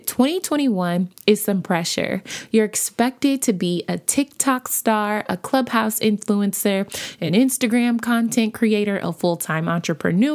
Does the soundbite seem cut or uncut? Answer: uncut